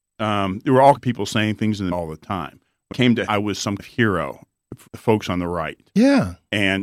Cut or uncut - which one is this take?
cut